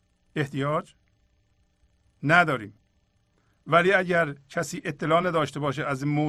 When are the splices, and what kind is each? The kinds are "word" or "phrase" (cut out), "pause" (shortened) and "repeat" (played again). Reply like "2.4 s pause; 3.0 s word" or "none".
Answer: none